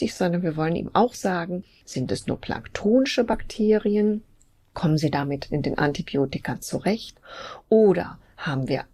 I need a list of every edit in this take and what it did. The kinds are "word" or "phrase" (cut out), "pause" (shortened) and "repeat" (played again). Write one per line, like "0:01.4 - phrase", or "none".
none